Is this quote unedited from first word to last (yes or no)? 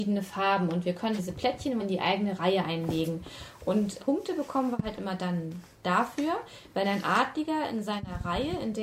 no